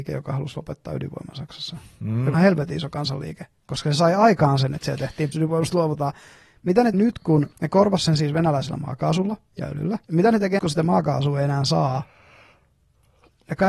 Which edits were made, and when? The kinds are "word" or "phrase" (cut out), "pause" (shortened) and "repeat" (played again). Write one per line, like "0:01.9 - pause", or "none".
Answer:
0:02.3 - phrase
0:03.5 - pause
0:05.3 - word
0:06.9 - word
0:07.5 - pause
0:09.5 - pause
0:10.0 - pause
0:10.6 - word